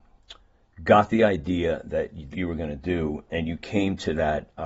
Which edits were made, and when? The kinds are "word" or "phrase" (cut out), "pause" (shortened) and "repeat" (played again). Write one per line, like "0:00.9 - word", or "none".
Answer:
0:02.3 - phrase